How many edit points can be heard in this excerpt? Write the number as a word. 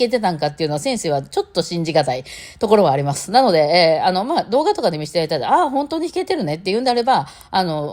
zero